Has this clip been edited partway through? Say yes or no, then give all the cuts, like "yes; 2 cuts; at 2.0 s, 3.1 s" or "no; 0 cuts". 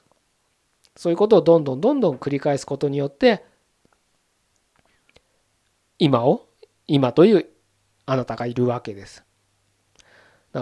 no; 0 cuts